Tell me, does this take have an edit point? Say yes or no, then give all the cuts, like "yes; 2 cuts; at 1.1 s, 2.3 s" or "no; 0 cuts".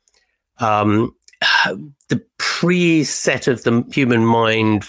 no; 0 cuts